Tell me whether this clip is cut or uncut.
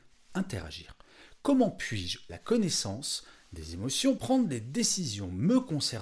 cut